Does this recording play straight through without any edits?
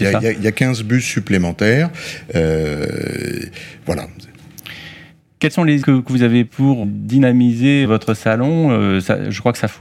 no; 4 cuts; at 5.8 s, 6.5 s, 6.8 s, 7.8 s

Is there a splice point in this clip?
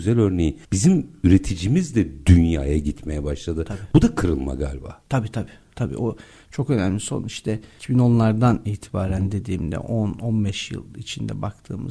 no; 0 cuts

